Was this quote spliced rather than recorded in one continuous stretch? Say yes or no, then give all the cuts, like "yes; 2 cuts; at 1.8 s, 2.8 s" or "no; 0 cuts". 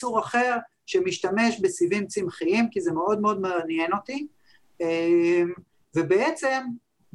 no; 0 cuts